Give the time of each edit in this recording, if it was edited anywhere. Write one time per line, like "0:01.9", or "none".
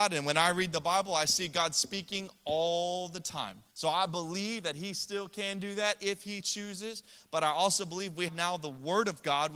0:03.7
0:06.4
0:08.3